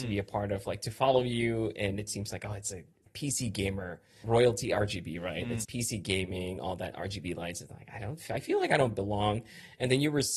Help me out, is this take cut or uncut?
cut